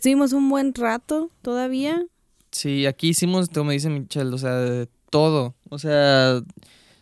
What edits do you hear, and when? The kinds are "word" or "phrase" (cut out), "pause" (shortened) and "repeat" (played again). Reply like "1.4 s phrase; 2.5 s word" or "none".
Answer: none